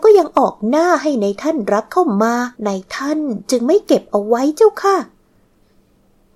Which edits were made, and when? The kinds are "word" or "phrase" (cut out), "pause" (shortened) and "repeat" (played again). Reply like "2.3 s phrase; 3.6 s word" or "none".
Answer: 2.5 s pause